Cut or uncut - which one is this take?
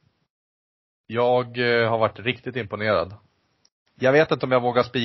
uncut